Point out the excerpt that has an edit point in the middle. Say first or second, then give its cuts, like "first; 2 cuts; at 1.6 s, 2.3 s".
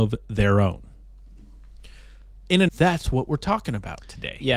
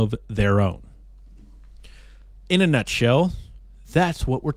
first; 1 cut; at 2.7 s